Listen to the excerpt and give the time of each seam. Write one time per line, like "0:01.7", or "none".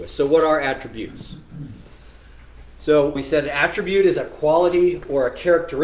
0:03.2